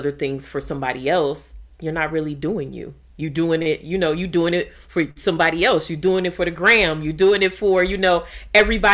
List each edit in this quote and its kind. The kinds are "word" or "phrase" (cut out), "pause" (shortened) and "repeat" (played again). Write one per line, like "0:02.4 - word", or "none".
none